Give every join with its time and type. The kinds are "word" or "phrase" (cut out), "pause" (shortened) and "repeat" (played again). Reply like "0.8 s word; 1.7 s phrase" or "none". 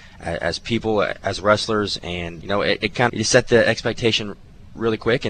2.4 s word; 3.1 s word